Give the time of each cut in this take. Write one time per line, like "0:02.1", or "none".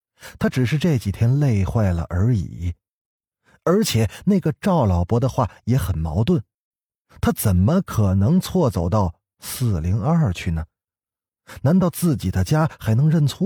none